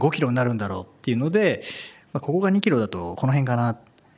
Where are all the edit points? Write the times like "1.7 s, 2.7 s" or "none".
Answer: none